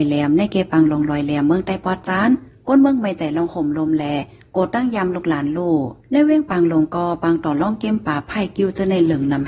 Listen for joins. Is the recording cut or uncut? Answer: uncut